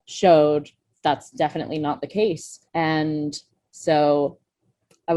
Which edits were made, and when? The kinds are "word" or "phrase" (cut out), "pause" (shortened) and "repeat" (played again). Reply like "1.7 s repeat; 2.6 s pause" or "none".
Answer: 2.7 s pause